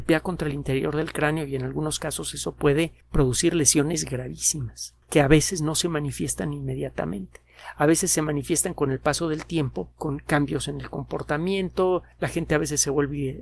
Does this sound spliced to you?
yes; 4 cuts; at 3.0 s, 5.0 s, 9.9 s, 12.1 s

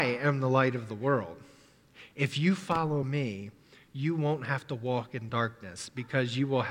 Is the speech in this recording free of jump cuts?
yes; 0 cuts

